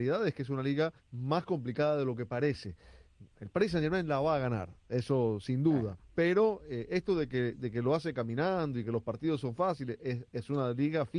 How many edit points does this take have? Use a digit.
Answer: 2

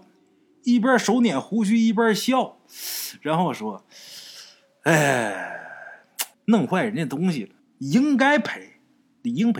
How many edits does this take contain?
2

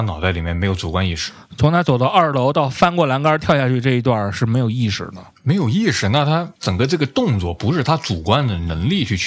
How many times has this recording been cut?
1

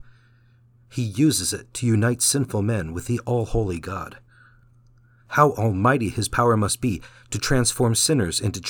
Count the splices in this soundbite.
0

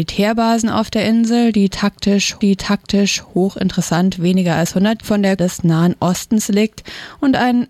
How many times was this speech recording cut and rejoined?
3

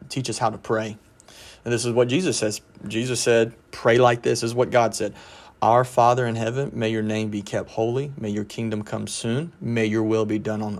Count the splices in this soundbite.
1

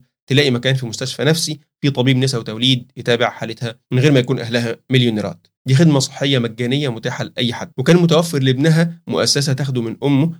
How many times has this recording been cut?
2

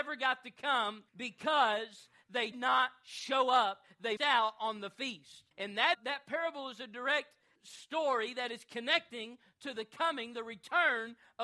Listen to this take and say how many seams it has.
6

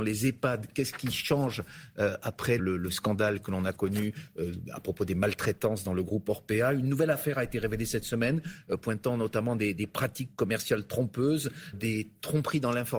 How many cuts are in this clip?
2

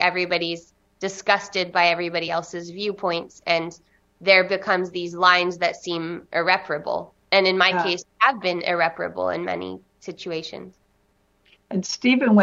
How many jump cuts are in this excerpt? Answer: 0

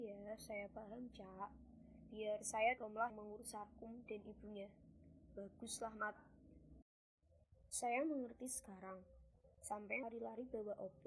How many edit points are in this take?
3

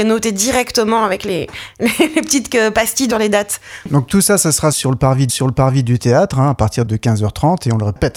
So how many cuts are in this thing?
2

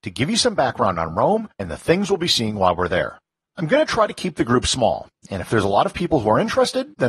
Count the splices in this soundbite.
2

